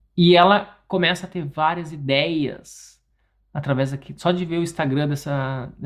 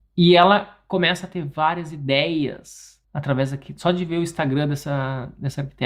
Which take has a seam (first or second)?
second